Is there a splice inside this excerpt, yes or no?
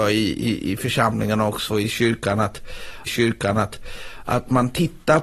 yes